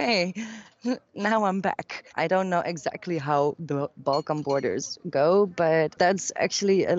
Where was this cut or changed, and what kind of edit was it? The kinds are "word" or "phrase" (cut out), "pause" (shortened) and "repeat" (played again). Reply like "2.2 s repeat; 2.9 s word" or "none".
2.1 s pause

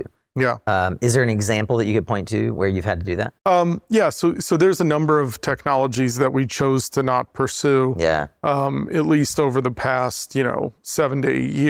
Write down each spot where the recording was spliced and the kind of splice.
3.4 s pause

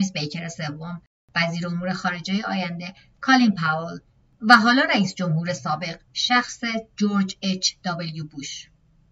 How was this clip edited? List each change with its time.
none

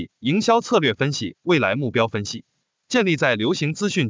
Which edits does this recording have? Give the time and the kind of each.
2.8 s phrase

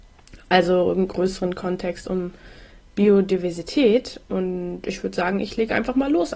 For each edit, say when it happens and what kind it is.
none

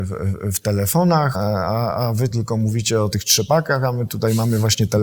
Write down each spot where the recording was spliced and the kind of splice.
1.3 s word; 2.3 s word

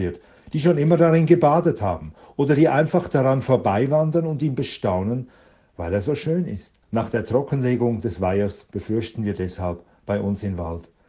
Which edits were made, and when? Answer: 6.8 s pause

